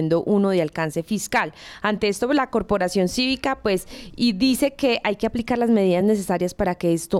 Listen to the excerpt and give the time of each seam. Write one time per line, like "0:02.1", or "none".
none